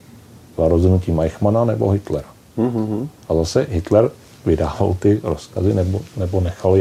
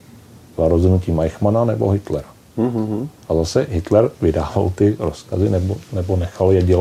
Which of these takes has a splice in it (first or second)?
second